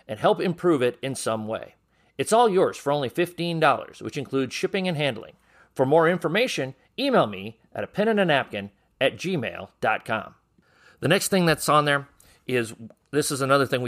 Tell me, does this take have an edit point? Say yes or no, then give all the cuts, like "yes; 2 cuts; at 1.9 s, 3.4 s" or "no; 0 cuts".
no; 0 cuts